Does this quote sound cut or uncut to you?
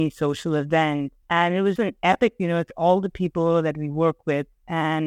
cut